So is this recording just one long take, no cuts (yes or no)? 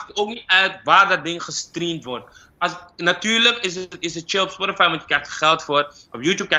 yes